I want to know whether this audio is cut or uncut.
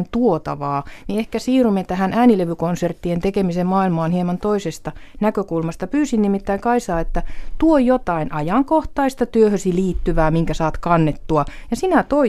uncut